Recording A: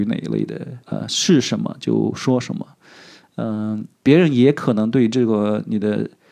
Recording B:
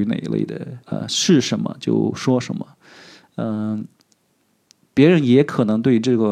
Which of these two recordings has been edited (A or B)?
A